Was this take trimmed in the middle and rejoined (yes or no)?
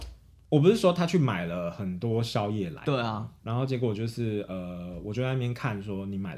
yes